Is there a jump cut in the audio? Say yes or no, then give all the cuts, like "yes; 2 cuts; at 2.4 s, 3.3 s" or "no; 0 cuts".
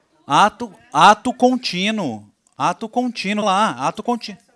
yes; 1 cut; at 3.4 s